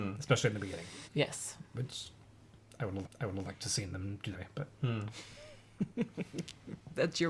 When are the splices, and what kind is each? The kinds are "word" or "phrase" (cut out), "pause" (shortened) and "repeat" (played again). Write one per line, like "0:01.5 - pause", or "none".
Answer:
0:01.1 - pause
0:03.0 - repeat
0:04.3 - phrase
0:04.7 - pause